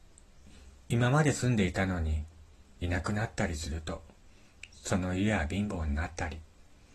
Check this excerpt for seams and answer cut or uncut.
uncut